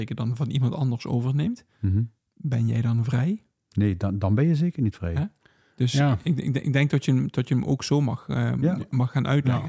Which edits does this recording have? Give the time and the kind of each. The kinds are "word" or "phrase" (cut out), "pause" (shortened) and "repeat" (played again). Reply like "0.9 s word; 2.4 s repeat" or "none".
none

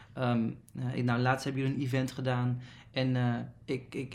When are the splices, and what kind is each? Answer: none

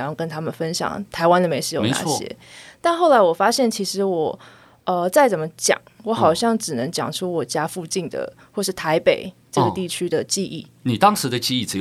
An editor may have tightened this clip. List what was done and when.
none

